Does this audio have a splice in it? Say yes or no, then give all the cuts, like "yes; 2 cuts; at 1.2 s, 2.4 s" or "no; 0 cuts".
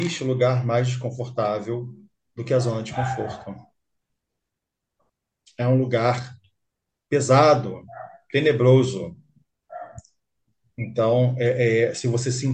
no; 0 cuts